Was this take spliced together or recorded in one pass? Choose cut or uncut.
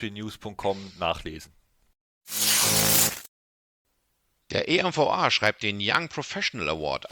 uncut